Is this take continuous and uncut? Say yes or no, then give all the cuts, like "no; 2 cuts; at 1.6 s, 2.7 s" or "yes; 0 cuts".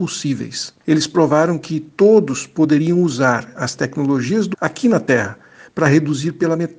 no; 1 cut; at 4.5 s